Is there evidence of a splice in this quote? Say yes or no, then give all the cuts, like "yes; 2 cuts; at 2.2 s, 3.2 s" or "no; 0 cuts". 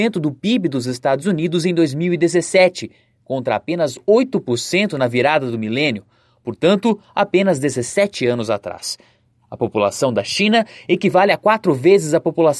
no; 0 cuts